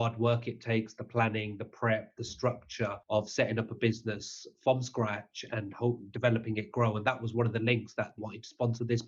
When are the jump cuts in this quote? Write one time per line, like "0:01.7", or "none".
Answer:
0:03.0
0:08.2